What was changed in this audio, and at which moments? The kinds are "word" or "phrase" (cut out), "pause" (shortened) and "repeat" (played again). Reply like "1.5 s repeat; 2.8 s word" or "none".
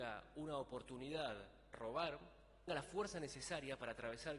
1.7 s word; 2.7 s phrase